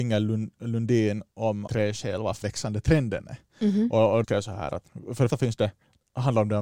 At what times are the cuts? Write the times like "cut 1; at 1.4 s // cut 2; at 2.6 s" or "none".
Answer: cut 1; at 1.7 s // cut 2; at 2.4 s // cut 3; at 4.2 s // cut 4; at 5.3 s